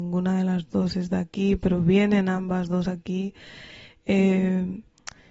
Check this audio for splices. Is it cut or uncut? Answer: uncut